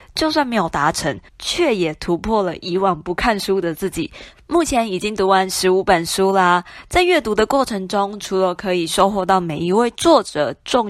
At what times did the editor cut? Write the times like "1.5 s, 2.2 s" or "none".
1.3 s